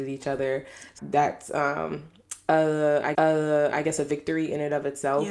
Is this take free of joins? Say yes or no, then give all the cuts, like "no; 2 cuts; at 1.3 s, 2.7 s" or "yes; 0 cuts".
no; 2 cuts; at 1.0 s, 3.1 s